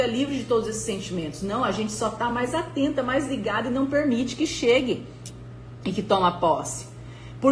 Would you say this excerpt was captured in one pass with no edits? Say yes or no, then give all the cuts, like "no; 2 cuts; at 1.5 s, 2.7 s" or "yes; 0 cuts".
yes; 0 cuts